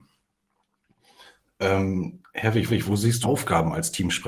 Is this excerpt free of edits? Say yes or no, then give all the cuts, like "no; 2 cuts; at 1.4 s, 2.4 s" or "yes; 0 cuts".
no; 2 cuts; at 2.7 s, 3.2 s